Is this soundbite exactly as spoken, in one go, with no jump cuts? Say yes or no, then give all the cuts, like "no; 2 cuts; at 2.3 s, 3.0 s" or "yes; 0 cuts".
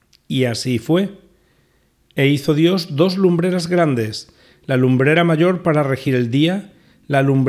yes; 0 cuts